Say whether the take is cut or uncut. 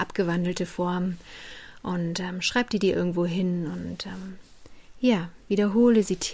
uncut